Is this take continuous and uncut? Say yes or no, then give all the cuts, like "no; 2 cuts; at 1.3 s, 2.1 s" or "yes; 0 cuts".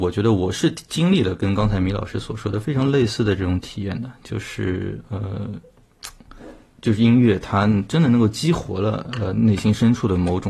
yes; 0 cuts